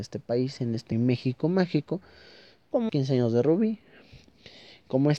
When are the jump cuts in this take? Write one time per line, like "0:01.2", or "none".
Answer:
0:00.9
0:02.9

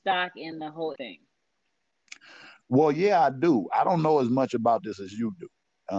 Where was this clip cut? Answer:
0:00.9

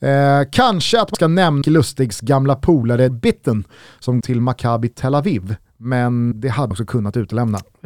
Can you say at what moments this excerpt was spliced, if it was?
0:01.1
0:01.6
0:03.1
0:04.2
0:06.3
0:06.7

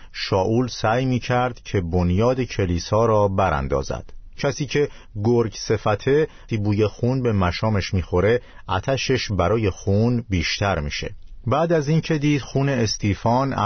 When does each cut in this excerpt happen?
0:06.5

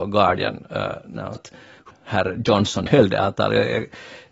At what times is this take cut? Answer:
0:01.4
0:01.9
0:02.9

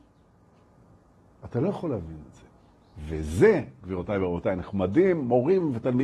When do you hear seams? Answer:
none

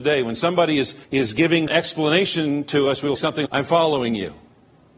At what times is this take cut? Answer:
0:01.0
0:01.7
0:03.2
0:03.5

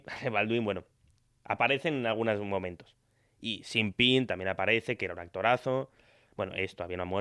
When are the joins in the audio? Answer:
none

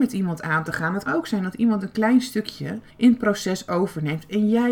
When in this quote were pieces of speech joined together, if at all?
0:01.1
0:02.9

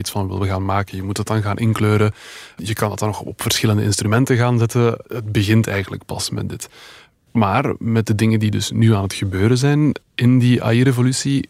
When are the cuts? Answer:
none

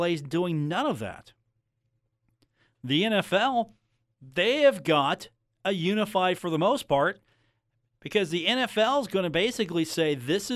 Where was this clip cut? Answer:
0:06.4

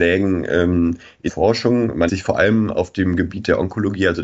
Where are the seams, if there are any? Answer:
0:01.3
0:02.1

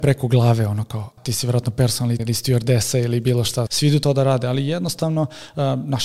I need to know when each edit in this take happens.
0:01.2
0:02.2
0:03.7

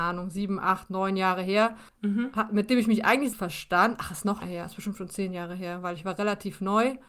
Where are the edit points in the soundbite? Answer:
0:01.9
0:03.3
0:04.4

